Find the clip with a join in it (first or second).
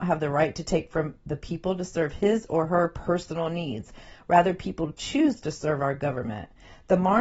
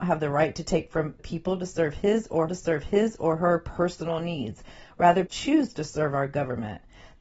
second